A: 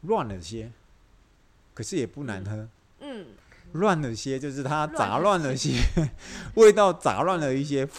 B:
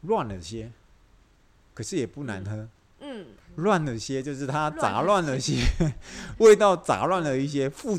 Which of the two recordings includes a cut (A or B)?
B